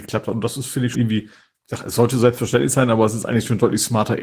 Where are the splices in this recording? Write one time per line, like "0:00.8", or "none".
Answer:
0:00.9